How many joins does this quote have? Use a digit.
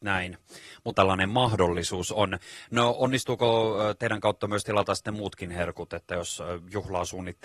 1